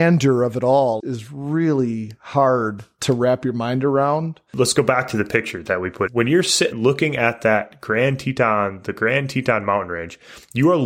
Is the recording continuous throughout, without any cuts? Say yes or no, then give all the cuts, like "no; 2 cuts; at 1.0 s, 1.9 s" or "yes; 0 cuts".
no; 3 cuts; at 1.0 s, 6.1 s, 6.7 s